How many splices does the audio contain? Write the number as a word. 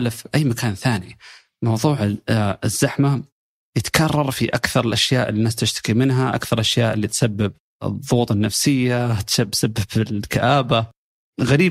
zero